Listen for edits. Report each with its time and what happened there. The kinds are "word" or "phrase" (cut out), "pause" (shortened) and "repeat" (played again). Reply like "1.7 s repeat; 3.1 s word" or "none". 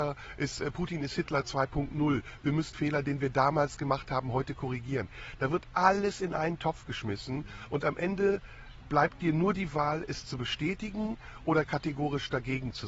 2.7 s word